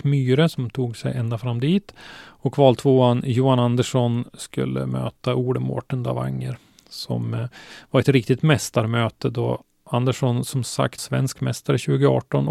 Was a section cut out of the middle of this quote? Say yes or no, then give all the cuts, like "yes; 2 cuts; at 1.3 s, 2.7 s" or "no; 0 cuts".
yes; 1 cut; at 11.0 s